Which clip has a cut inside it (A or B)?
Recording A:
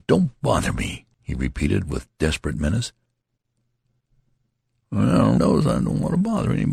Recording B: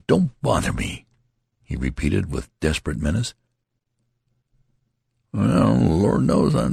A